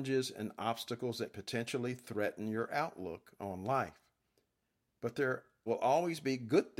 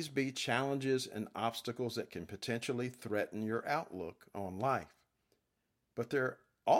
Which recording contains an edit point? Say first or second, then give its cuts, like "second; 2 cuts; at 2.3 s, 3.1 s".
first; 2 cuts; at 1.3 s, 5.7 s